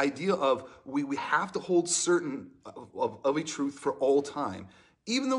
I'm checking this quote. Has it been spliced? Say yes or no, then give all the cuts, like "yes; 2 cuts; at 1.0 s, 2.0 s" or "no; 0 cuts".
no; 0 cuts